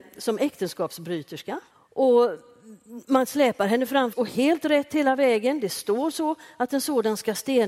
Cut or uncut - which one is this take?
cut